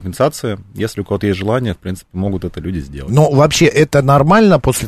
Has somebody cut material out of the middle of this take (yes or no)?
no